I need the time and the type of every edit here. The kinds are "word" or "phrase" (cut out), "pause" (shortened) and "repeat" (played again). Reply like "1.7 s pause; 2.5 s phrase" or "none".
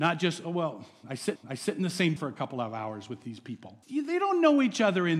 1.4 s repeat; 2.2 s word; 3.8 s pause

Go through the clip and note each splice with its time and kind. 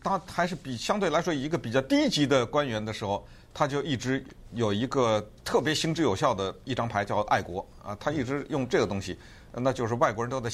5.4 s pause

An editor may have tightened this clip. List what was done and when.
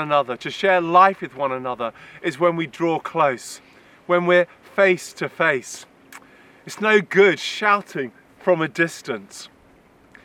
none

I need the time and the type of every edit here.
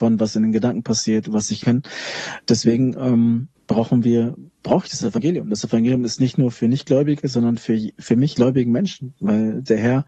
1.6 s phrase; 3.5 s pause; 6.5 s word; 8.3 s phrase

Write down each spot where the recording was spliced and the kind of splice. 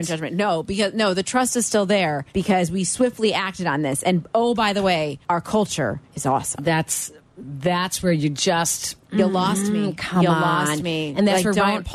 2.3 s pause; 5.2 s pause; 6.1 s pause

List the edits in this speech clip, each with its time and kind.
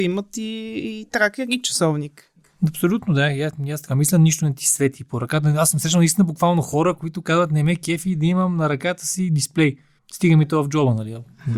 10.0 s pause

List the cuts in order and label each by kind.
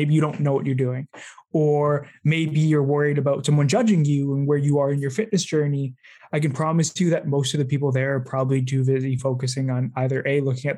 none

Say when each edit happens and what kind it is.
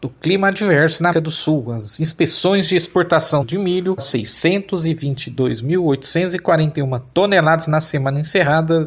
1.1 s word; 3.4 s word; 4.0 s word

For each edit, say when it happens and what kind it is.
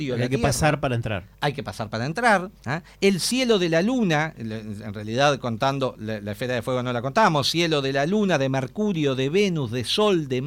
2.6 s pause

